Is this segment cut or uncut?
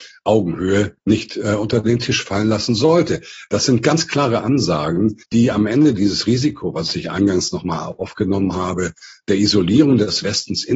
cut